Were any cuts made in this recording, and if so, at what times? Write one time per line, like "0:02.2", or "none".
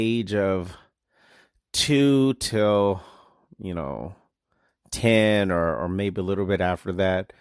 none